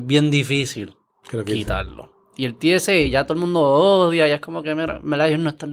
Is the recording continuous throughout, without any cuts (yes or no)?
yes